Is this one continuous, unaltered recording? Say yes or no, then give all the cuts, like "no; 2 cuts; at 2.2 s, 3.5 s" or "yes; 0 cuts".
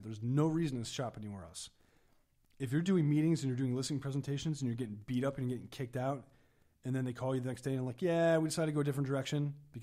yes; 0 cuts